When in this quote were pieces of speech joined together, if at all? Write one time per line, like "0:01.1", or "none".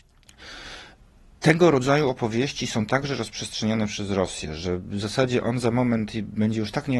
none